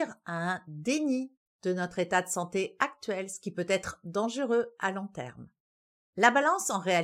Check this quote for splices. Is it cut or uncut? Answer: cut